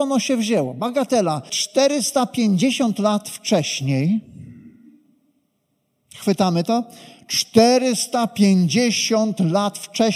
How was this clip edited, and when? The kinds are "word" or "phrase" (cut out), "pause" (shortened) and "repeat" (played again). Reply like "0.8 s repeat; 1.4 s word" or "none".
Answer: 1.5 s word